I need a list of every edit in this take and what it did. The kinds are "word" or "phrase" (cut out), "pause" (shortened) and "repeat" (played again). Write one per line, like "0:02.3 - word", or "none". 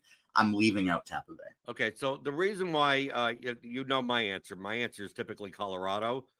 0:01.6 - pause